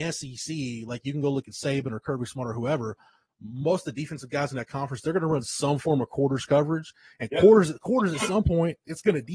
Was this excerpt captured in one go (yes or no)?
yes